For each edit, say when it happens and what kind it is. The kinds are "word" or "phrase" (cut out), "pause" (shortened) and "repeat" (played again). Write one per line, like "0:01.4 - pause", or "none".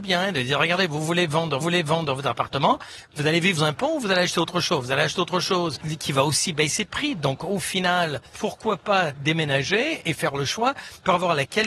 0:01.6 - repeat
0:03.6 - word